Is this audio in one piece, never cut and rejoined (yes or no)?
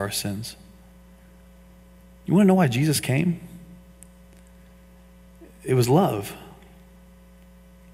yes